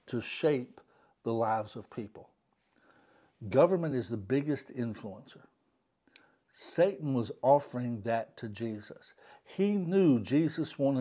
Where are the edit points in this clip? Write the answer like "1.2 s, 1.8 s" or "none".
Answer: none